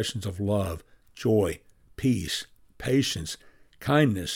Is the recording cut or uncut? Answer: uncut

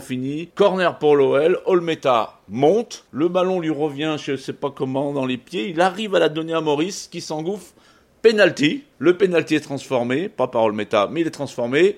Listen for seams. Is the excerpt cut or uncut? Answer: uncut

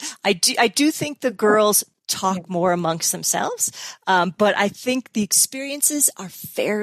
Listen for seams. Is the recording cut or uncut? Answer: uncut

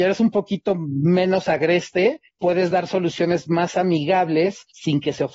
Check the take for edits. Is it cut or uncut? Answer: uncut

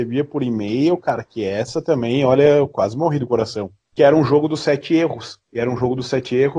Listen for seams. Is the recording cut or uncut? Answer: cut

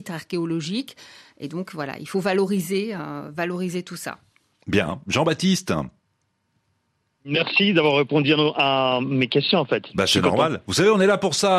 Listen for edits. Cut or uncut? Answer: uncut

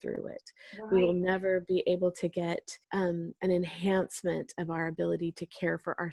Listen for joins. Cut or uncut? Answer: cut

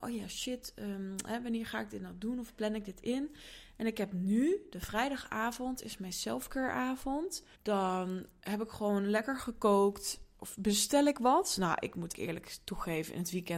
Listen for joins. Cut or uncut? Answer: cut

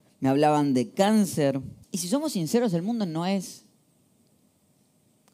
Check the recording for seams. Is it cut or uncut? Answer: cut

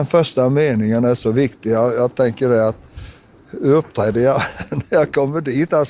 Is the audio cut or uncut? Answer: uncut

